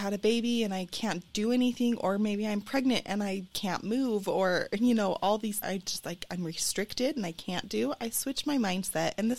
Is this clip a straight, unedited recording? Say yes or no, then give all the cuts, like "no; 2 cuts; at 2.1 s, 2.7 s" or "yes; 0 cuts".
no; 2 cuts; at 3.5 s, 5.6 s